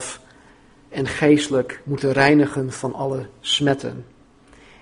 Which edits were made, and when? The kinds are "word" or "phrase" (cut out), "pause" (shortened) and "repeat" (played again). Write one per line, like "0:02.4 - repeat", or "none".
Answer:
0:00.9 - word

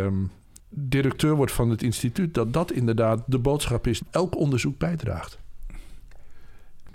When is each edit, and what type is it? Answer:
0:04.1 - word

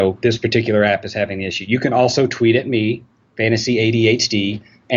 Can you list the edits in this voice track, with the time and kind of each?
none

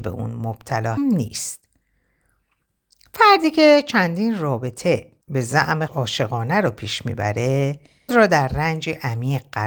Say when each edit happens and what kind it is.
0:01.0 - word
0:05.2 - pause
0:05.9 - word
0:08.1 - word

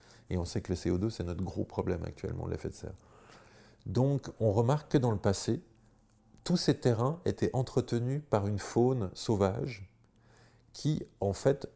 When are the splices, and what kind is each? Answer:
none

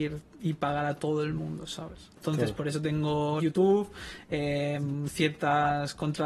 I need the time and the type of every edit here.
0:03.4 - word

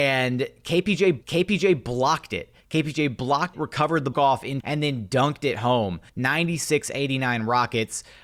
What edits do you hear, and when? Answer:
0:01.2 - repeat
0:02.6 - pause
0:03.5 - word
0:04.1 - phrase
0:04.6 - word
0:06.1 - pause

